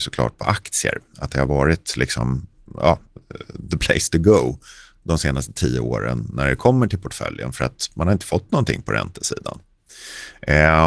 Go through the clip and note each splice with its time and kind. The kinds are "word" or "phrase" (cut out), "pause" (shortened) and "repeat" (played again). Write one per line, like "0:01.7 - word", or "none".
none